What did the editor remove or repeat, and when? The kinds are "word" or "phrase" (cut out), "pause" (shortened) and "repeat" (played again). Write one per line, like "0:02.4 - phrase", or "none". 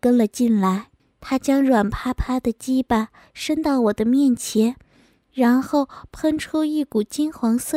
0:01.0 - pause